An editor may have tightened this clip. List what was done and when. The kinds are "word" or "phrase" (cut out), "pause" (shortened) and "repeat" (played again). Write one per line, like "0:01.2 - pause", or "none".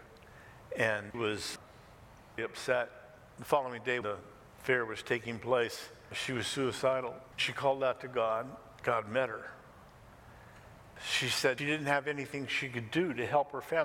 0:01.1 - word
0:02.4 - word
0:04.0 - word
0:07.4 - word
0:08.8 - word
0:11.6 - word